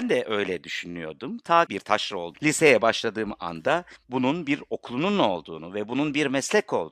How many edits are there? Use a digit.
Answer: 2